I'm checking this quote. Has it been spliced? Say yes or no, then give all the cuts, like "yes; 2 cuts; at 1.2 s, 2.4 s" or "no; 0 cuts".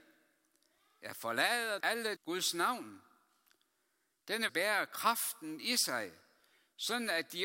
yes; 3 cuts; at 1.8 s, 2.2 s, 4.5 s